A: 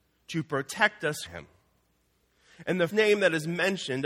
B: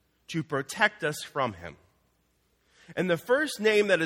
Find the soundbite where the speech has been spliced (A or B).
A